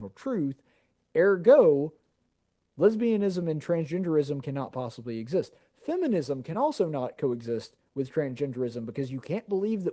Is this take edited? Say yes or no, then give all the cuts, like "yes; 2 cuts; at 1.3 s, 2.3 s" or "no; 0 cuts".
no; 0 cuts